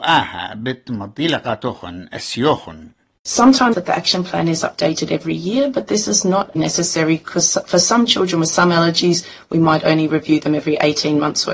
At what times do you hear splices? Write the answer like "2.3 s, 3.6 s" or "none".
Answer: 3.7 s, 6.6 s